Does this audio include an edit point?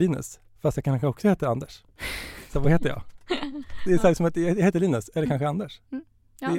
no; 0 cuts

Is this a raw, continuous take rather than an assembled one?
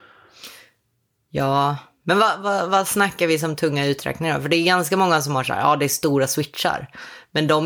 yes; 0 cuts

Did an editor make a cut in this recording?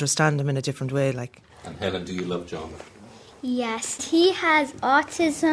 yes; 1 cut; at 4.0 s

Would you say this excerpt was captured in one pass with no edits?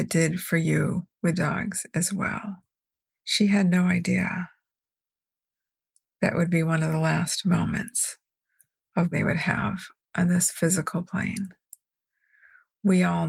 no; 3 cuts; at 1.3 s, 3.1 s, 9.1 s

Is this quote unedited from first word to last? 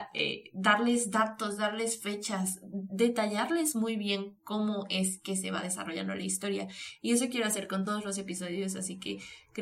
yes; 0 cuts

